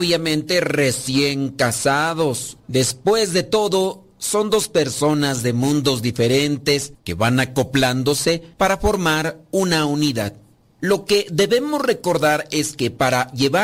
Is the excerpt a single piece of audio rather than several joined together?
no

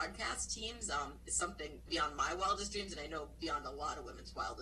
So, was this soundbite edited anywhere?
yes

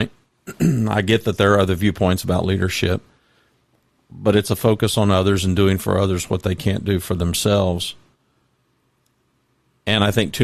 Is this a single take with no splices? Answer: yes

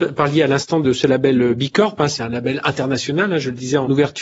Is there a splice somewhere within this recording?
no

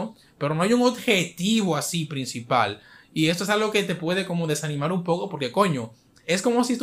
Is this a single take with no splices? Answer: yes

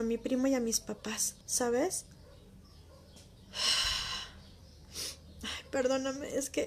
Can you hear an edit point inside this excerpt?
yes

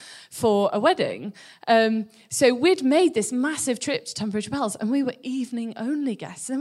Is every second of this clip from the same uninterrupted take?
yes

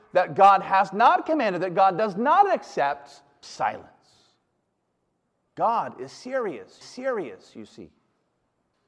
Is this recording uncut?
no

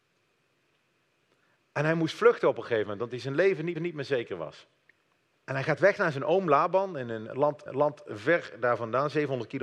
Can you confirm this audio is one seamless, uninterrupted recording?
no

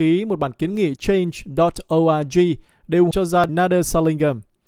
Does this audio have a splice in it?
yes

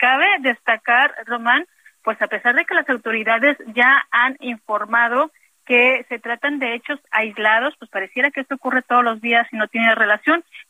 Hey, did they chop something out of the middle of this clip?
no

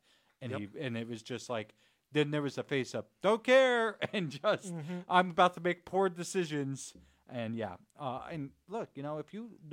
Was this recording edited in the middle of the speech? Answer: no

